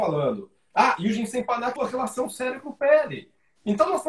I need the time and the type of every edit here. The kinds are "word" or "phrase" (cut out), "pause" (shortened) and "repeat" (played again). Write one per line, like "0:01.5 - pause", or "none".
0:01.8 - word